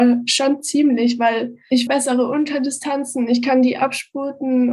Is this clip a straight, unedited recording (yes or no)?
no